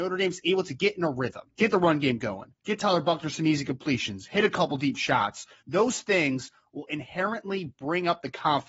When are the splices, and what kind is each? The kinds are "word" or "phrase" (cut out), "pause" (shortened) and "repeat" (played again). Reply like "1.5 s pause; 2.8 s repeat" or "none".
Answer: 1.5 s pause; 2.6 s pause; 5.6 s pause